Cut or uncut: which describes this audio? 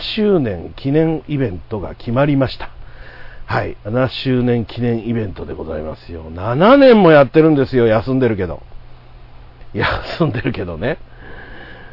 cut